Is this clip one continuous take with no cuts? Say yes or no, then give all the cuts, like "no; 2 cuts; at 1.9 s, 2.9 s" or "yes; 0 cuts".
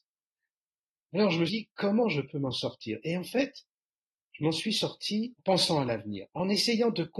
no; 2 cuts; at 1.5 s, 5.4 s